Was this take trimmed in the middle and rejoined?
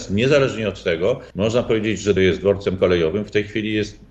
yes; 2 cuts; at 1.3 s, 2.2 s

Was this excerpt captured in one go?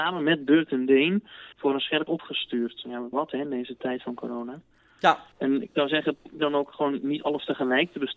no; 5 cuts; at 1.5 s, 2.1 s, 3.1 s, 5.3 s, 6.4 s

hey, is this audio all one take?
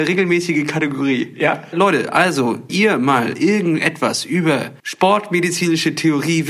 no; 3 cuts; at 1.7 s, 2.7 s, 4.8 s

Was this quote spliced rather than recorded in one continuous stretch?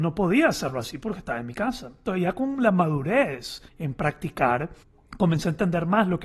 yes; 2 cuts; at 3.7 s, 4.8 s

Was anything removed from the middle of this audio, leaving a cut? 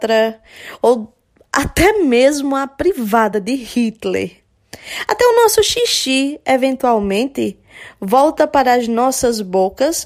no; 0 cuts

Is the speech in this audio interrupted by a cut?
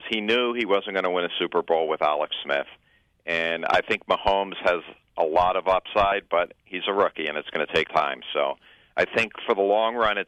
yes; 1 cut; at 7.9 s

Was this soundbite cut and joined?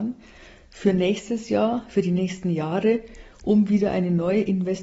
no; 0 cuts

